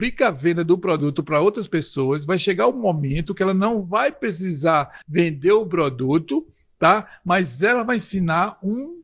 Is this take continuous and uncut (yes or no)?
no